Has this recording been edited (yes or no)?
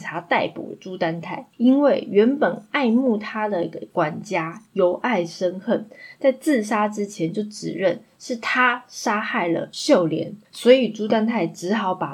yes